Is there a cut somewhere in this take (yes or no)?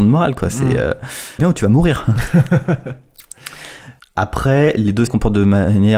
yes